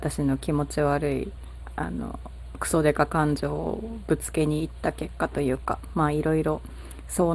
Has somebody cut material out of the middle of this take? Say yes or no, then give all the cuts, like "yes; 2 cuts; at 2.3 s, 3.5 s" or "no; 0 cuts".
no; 0 cuts